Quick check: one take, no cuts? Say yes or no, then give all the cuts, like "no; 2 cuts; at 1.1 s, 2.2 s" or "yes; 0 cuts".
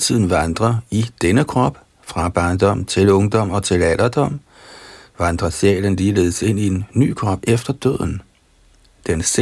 yes; 0 cuts